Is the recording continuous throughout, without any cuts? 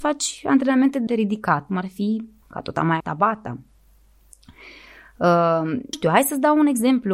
no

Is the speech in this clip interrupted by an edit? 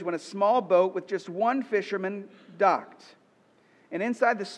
no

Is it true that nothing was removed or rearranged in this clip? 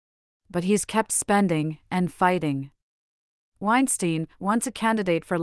yes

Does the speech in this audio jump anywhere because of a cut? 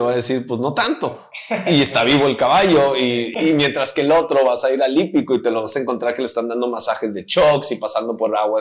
no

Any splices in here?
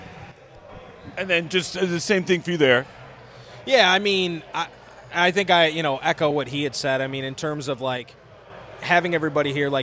no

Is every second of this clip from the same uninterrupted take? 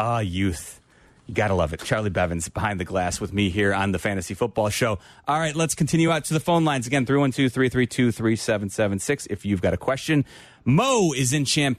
yes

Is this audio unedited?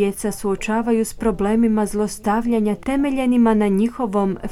yes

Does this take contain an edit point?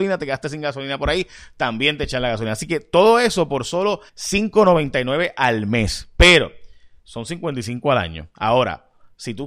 yes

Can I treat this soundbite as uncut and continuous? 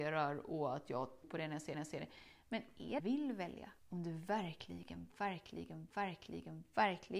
no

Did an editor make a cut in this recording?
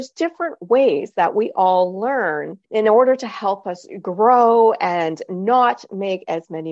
yes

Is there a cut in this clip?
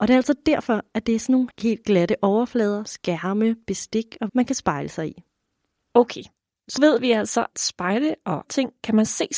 yes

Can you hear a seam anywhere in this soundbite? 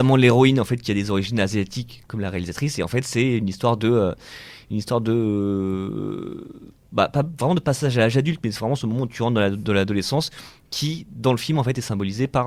yes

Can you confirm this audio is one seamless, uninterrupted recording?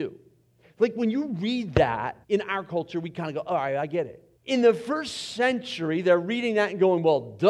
no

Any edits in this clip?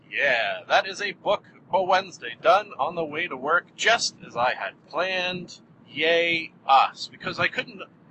yes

